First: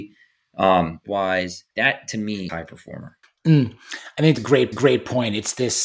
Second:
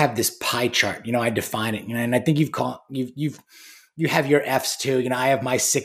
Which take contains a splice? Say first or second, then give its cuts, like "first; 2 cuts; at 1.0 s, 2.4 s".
first; 6 cuts; at 1.0 s, 1.7 s, 2.5 s, 3.2 s, 4.4 s, 4.7 s